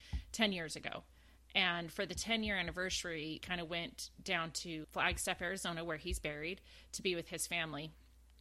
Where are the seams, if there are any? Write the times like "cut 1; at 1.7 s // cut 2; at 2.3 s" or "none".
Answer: cut 1; at 3.4 s // cut 2; at 4.8 s